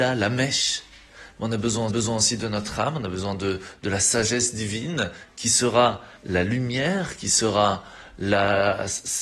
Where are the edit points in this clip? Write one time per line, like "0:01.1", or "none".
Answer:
0:01.9
0:06.2

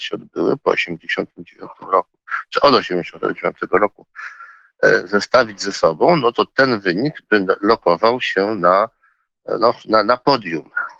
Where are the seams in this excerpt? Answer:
none

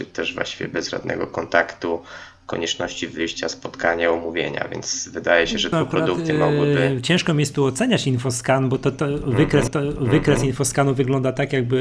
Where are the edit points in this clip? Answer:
0:05.7
0:09.7

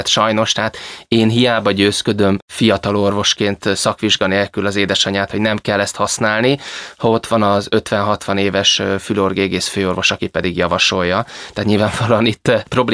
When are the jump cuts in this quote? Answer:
none

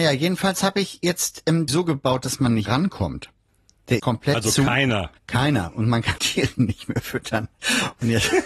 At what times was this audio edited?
0:01.7
0:02.6
0:04.0
0:05.2
0:06.2

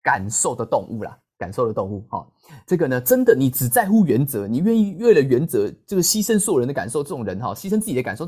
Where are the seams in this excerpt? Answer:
none

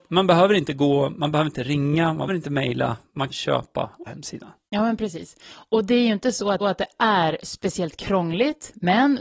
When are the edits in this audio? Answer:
0:02.3
0:03.3
0:04.1
0:06.6

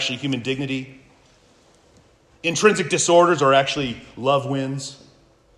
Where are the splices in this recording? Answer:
none

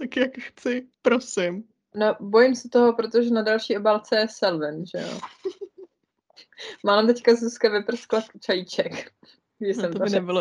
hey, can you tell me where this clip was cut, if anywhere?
0:00.9

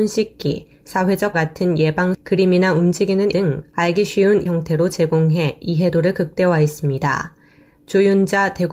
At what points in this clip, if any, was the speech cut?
0:01.3
0:02.1
0:03.3
0:04.5

